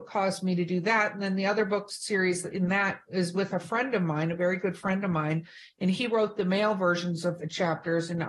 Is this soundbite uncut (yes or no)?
yes